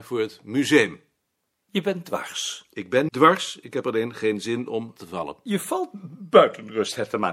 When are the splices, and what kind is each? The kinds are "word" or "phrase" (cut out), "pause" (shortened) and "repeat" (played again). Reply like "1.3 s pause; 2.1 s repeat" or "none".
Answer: 3.1 s word; 5.0 s phrase